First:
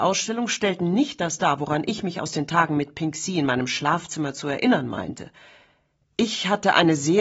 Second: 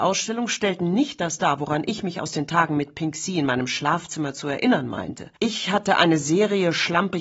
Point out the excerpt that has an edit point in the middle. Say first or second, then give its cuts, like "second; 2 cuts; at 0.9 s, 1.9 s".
second; 1 cut; at 5.4 s